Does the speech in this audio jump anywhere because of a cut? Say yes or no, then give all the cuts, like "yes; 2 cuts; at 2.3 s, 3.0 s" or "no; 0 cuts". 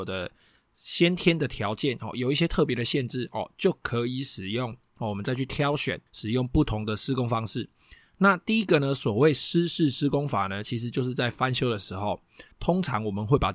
yes; 2 cuts; at 6.1 s, 12.5 s